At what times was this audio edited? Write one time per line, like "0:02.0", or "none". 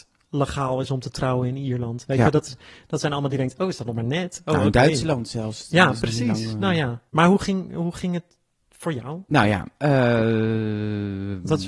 0:03.3
0:07.1
0:09.3